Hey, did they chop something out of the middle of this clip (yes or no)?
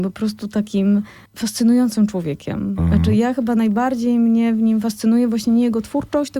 no